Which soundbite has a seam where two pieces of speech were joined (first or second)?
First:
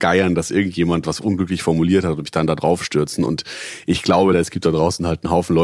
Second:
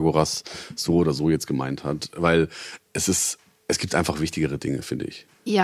first